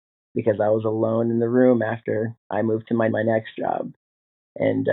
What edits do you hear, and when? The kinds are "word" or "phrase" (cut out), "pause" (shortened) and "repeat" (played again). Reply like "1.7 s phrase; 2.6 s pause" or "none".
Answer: 2.4 s pause; 3.1 s phrase